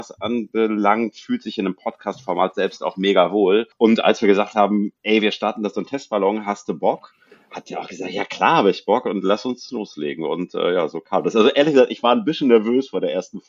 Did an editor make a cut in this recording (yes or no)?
yes